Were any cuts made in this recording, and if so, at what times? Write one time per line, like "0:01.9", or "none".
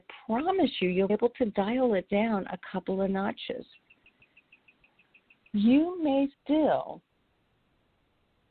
0:01.1
0:06.3